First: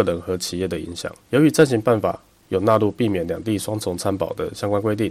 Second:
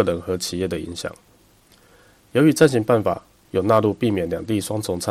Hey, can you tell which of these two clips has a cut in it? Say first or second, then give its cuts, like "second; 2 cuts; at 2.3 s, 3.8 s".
first; 1 cut; at 1.2 s